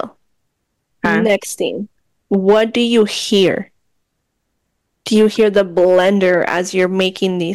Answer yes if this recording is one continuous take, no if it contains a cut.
yes